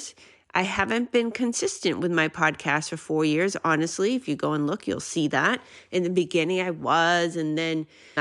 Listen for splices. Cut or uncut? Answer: uncut